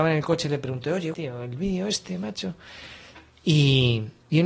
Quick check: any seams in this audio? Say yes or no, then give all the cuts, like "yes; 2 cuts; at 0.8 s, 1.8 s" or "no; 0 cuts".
yes; 1 cut; at 1.1 s